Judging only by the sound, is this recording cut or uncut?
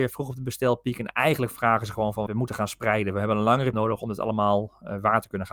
cut